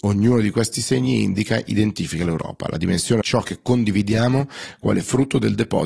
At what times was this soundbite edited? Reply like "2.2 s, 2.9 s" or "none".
3.2 s